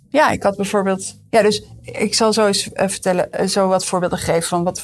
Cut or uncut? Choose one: uncut